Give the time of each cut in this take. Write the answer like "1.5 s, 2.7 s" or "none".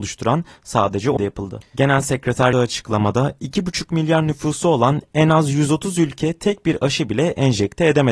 1.2 s, 2.5 s